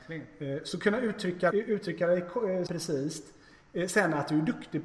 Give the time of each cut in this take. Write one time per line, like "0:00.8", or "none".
0:01.5
0:02.7